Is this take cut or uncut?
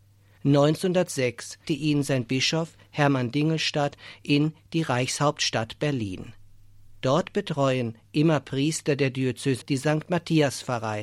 cut